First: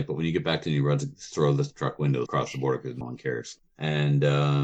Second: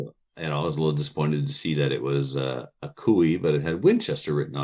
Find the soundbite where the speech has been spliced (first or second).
first